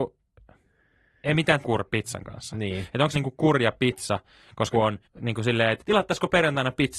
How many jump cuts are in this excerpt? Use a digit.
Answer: 5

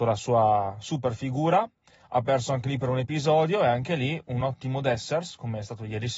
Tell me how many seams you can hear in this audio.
0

